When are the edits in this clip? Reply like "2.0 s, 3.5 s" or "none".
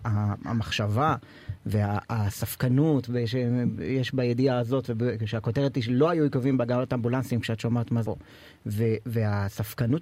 8.0 s